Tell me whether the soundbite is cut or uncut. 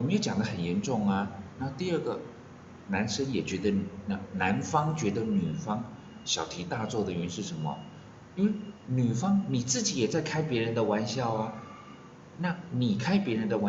uncut